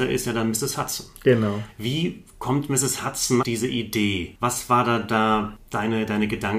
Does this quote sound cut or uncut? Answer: cut